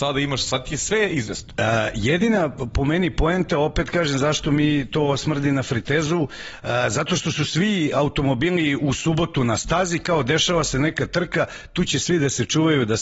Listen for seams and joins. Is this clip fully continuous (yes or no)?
yes